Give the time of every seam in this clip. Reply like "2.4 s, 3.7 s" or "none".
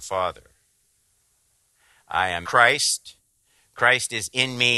2.4 s